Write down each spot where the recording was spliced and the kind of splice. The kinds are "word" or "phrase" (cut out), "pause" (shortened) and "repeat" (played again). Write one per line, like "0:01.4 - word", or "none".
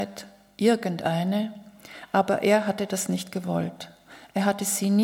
none